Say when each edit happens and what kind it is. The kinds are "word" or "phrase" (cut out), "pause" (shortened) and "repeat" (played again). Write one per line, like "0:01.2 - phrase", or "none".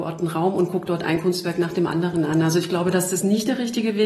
none